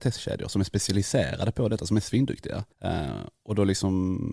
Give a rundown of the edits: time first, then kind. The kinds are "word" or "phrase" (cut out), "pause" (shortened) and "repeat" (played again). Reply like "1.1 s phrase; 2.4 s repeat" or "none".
2.7 s pause